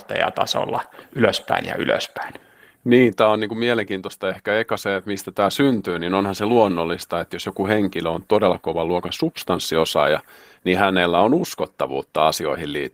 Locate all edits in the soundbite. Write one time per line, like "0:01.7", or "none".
none